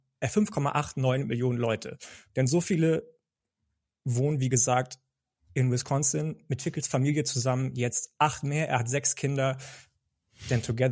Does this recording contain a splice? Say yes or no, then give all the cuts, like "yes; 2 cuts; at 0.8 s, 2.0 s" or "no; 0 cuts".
no; 0 cuts